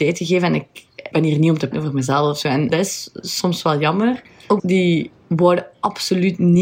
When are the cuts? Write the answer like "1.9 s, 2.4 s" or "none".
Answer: 1.1 s, 1.7 s, 2.7 s, 4.6 s